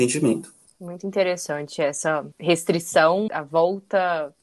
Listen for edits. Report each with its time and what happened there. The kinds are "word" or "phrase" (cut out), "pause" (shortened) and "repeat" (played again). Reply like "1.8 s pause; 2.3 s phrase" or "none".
3.3 s word